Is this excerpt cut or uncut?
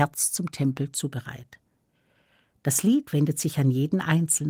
uncut